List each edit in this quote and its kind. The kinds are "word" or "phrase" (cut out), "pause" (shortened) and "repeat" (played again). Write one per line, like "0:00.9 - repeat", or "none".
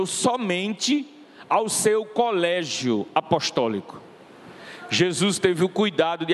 none